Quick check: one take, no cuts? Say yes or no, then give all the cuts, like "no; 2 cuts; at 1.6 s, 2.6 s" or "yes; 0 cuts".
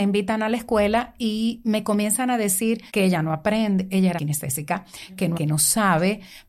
no; 3 cuts; at 2.9 s, 4.2 s, 5.3 s